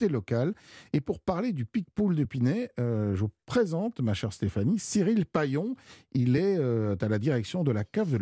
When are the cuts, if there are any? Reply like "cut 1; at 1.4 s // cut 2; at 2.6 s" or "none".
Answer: none